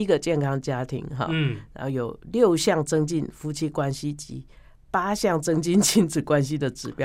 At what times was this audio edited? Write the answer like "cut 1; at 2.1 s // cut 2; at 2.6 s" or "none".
none